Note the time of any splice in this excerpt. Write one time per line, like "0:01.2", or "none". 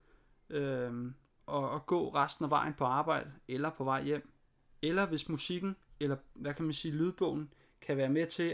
none